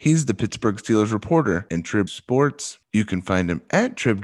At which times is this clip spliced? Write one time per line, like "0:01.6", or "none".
0:01.7
0:02.1